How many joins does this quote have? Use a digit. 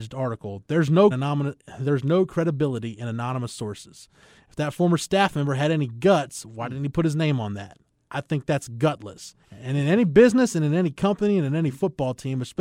2